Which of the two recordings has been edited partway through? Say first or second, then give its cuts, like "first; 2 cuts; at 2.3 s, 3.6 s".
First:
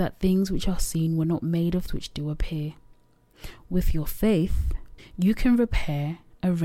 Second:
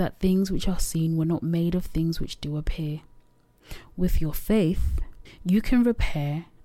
first; 1 cut; at 1.9 s